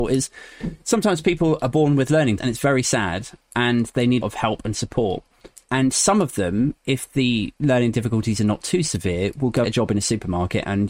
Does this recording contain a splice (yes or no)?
yes